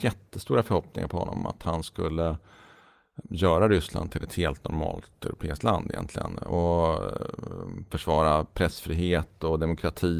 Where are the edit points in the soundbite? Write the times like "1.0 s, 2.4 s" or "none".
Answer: 3.2 s